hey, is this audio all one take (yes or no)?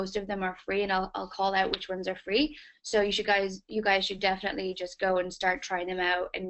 yes